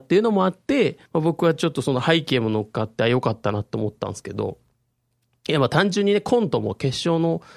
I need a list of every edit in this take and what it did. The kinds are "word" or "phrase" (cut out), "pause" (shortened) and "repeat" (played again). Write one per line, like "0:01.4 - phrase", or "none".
0:01.1 - pause